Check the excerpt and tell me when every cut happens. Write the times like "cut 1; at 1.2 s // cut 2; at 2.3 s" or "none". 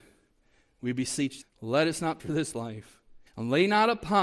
cut 1; at 1.4 s // cut 2; at 2.2 s // cut 3; at 2.5 s // cut 4; at 3.3 s